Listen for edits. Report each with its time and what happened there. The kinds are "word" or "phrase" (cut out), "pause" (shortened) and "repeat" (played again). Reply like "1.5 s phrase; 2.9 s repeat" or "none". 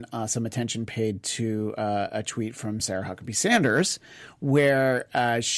none